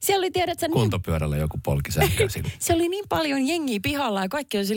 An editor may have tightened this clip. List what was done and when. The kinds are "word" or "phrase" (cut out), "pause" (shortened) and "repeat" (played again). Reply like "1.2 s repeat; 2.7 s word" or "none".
none